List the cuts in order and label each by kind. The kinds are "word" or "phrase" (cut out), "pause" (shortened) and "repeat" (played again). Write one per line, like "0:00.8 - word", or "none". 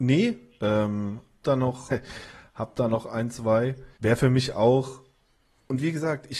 0:01.4 - word
0:01.9 - word
0:03.9 - pause